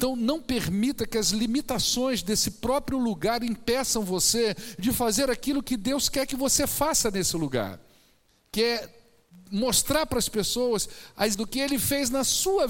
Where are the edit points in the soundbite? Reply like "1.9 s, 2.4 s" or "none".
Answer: 11.3 s